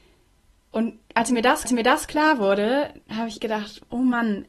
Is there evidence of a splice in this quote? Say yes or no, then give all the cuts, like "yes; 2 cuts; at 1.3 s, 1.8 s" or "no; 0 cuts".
yes; 4 cuts; at 1.0 s, 1.6 s, 3.0 s, 3.4 s